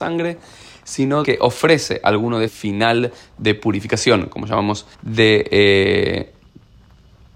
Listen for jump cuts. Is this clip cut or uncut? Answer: cut